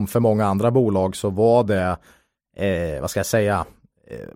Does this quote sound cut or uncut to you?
uncut